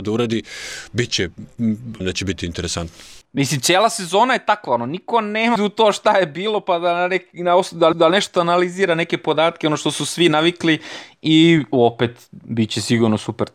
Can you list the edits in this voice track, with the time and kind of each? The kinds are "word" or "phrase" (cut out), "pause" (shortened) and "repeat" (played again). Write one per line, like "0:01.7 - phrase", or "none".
0:02.0 - word
0:03.2 - pause
0:05.6 - word
0:07.9 - repeat